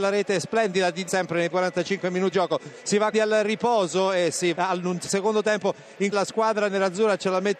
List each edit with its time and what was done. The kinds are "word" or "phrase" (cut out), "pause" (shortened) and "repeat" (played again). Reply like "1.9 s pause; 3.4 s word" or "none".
1.1 s word; 1.5 s word; 2.3 s word; 3.1 s word; 4.5 s word; 6.1 s word